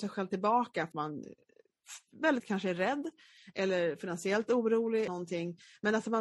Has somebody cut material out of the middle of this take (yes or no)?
yes